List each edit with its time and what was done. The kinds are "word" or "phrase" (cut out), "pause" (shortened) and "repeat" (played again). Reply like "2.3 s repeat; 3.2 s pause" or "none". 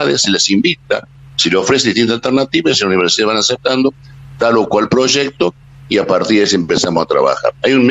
none

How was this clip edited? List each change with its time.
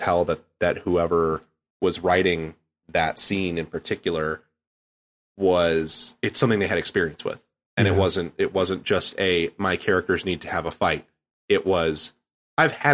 none

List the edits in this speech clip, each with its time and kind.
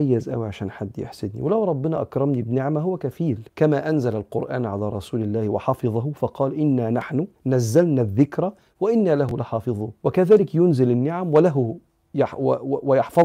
3.5 s pause; 7.3 s pause; 10.0 s pause

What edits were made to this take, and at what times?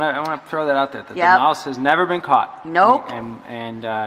none

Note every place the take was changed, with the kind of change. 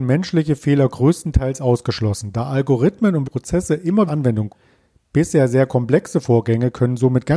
3.2 s word; 4.1 s phrase; 4.5 s word

